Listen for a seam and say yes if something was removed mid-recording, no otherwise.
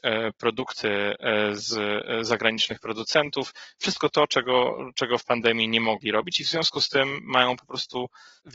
no